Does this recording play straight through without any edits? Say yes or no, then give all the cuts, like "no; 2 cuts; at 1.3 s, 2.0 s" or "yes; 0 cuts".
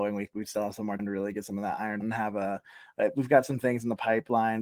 no; 2 cuts; at 1.0 s, 2.0 s